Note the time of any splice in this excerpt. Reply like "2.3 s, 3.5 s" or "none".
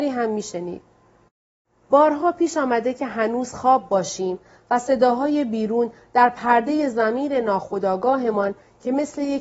none